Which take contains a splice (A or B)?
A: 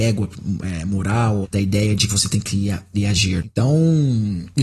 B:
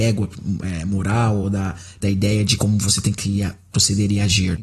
A